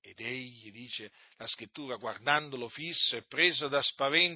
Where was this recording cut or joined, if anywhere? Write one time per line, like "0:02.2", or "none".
none